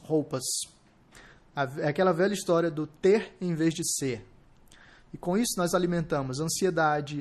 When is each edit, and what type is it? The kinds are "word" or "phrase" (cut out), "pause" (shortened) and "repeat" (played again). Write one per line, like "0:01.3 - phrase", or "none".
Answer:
none